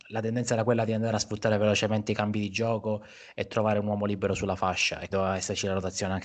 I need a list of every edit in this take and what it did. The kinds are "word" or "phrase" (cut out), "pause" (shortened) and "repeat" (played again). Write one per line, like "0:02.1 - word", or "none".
0:05.1 - word